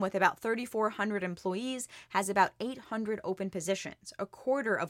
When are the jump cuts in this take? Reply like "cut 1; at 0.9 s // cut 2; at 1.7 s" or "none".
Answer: none